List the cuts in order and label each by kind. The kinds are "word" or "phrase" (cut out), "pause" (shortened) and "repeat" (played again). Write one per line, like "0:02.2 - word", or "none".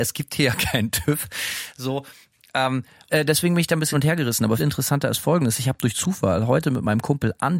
0:03.1 - word
0:03.9 - word
0:04.6 - word